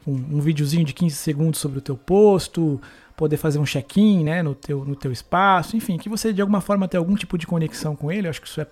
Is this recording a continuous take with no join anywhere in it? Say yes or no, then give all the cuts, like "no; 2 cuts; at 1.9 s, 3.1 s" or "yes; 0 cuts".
yes; 0 cuts